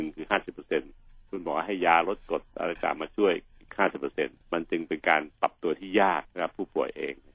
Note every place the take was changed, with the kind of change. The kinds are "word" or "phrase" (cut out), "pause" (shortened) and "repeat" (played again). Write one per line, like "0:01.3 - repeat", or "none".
0:01.3 - pause
0:04.4 - pause
0:05.4 - pause
0:06.3 - pause